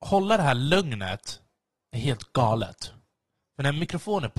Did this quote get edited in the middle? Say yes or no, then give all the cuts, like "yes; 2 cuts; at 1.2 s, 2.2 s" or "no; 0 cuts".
no; 0 cuts